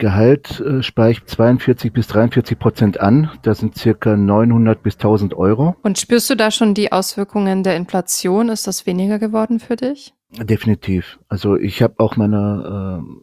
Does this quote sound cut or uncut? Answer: uncut